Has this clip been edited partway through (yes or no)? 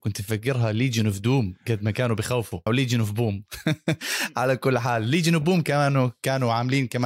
yes